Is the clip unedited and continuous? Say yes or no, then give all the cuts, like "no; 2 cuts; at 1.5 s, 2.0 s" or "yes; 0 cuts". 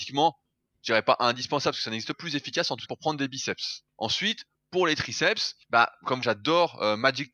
no; 5 cuts; at 2.1 s, 2.9 s, 3.9 s, 5.6 s, 6.2 s